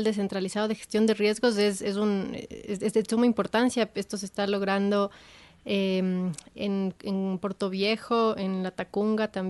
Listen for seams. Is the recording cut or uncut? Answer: uncut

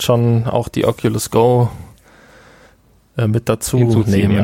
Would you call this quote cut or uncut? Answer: uncut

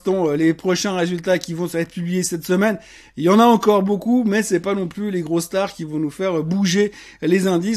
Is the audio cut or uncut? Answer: uncut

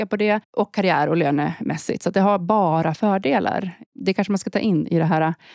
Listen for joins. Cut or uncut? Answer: uncut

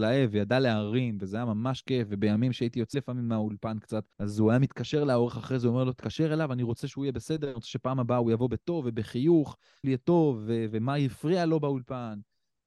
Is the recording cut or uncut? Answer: cut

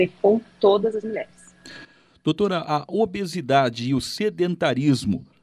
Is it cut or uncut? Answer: uncut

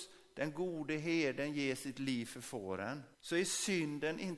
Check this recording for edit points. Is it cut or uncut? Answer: cut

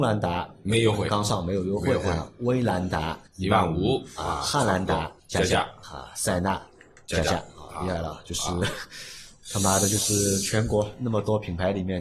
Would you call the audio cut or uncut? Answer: cut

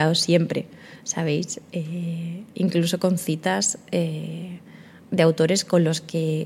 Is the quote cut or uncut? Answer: uncut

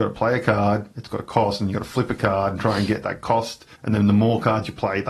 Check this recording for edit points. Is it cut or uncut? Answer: cut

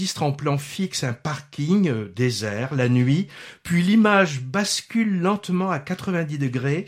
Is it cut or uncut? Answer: uncut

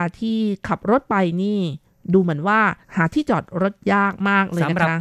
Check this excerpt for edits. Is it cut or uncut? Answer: cut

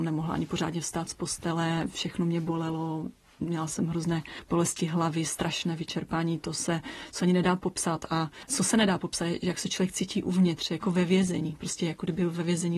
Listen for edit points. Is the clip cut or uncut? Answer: uncut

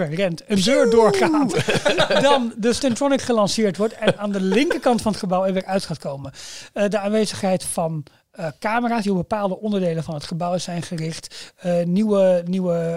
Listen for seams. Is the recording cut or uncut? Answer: uncut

